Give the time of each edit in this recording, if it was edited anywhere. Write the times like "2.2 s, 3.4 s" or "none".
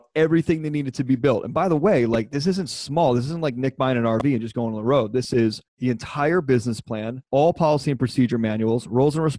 5.7 s, 7.3 s